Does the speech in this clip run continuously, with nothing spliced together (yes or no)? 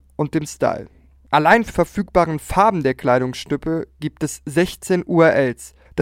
no